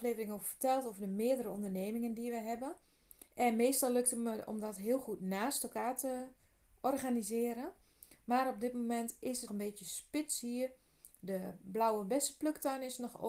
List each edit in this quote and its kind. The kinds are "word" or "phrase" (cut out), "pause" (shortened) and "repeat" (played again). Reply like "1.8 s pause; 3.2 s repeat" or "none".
3.3 s pause; 9.5 s word